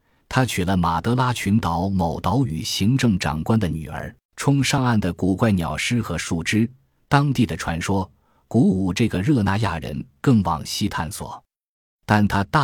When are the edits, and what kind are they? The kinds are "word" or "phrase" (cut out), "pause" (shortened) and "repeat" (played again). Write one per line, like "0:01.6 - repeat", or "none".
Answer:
0:04.2 - pause